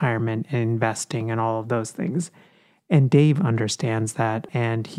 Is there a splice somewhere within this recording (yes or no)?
no